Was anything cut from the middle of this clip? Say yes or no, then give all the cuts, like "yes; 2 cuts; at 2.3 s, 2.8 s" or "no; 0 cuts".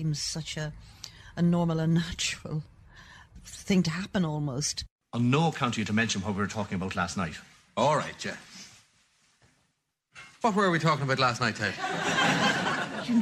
no; 0 cuts